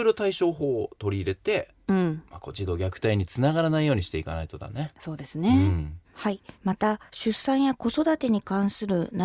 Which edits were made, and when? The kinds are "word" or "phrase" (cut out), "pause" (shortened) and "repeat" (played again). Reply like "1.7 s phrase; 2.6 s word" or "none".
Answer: 6.0 s pause; 6.5 s pause; 7.1 s pause